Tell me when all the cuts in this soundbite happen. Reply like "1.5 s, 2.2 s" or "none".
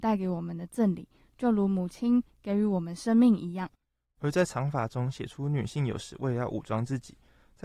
none